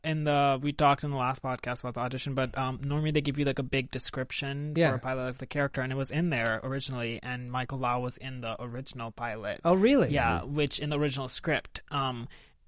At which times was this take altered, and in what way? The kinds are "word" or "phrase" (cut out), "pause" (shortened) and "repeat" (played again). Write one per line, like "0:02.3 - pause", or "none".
none